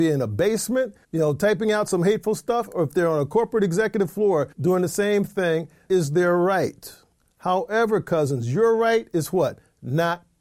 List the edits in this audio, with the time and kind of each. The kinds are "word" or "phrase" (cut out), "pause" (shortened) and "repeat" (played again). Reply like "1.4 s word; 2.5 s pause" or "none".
1.0 s pause; 4.5 s pause; 5.9 s word